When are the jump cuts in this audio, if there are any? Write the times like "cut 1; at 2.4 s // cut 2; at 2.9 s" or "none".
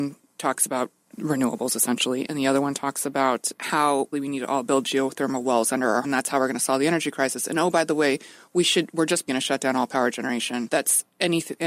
cut 1; at 1.1 s // cut 2; at 4.1 s // cut 3; at 6.0 s // cut 4; at 9.3 s